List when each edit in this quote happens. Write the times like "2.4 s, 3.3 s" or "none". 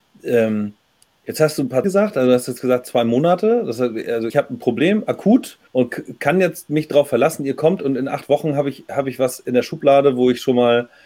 1.8 s, 4.3 s, 5.7 s

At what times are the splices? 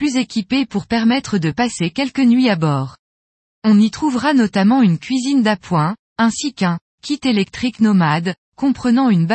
none

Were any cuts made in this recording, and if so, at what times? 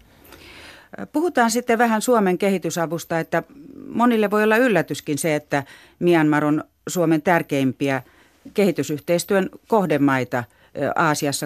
none

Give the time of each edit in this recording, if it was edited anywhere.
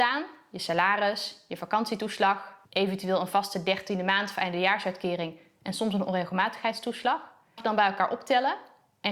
2.6 s, 7.6 s

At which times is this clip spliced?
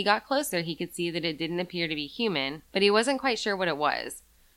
none

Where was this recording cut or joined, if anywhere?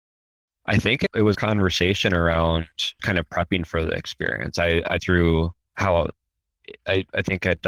1.3 s, 3.0 s, 5.0 s

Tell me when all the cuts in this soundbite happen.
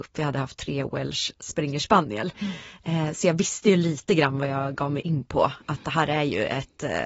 none

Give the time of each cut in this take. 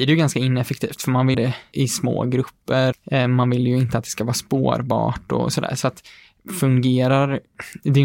1.3 s, 1.7 s, 2.9 s

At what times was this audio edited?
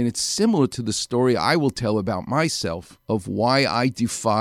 3.0 s

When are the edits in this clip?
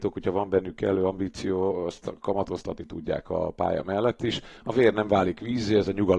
4.6 s

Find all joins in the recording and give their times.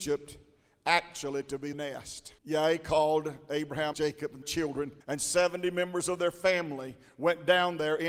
1.7 s, 2.4 s, 3.9 s, 4.4 s, 5.0 s

